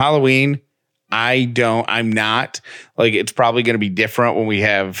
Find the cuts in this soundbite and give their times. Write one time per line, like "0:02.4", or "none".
none